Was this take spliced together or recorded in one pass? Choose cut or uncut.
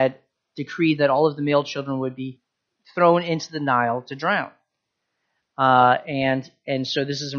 uncut